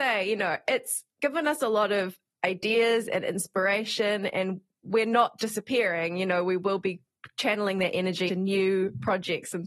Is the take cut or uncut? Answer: cut